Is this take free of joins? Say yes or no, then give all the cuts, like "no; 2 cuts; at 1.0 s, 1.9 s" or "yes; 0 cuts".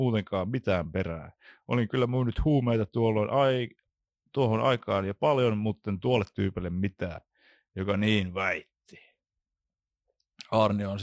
yes; 0 cuts